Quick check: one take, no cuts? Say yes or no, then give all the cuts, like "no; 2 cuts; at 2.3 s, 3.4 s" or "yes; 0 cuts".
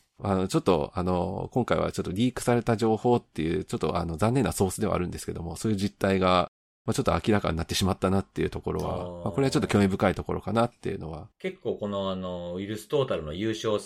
no; 1 cut; at 11.3 s